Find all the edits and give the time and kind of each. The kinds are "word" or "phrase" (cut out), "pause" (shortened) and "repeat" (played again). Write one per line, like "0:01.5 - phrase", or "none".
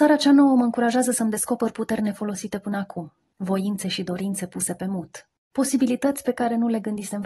none